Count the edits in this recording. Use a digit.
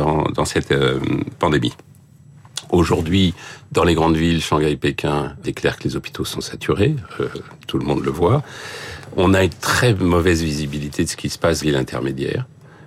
2